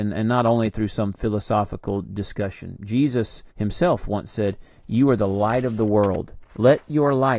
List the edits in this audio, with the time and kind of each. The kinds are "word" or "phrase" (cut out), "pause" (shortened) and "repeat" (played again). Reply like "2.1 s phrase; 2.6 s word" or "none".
3.5 s pause; 6.5 s pause